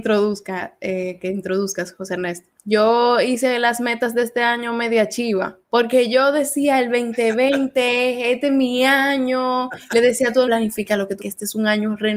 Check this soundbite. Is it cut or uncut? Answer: cut